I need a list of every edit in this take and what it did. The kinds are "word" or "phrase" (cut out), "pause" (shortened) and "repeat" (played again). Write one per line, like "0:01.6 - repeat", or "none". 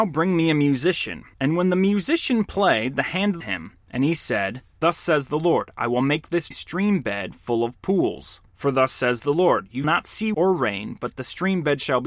0:01.3 - pause
0:03.4 - phrase
0:03.8 - pause
0:06.5 - word
0:08.5 - pause
0:09.8 - word
0:10.3 - word